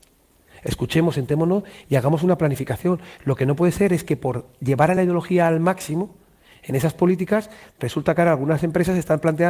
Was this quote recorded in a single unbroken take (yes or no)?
yes